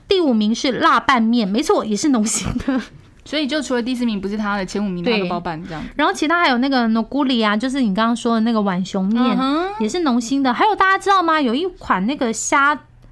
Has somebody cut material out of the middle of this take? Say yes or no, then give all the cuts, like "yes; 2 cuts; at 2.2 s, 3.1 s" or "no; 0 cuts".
no; 0 cuts